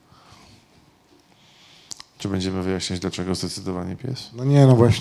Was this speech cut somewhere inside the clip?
no; 0 cuts

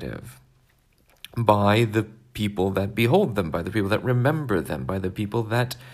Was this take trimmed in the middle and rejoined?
no; 0 cuts

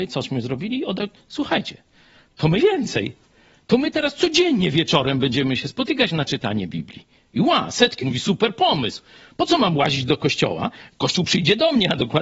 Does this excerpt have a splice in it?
yes; 3 cuts; at 1.0 s, 2.6 s, 8.0 s

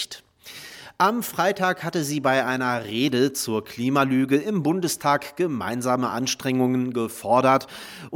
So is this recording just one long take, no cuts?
yes; 0 cuts

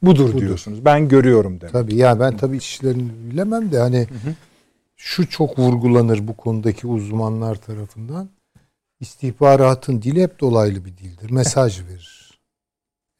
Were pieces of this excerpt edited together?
yes; 1 cut; at 2.6 s

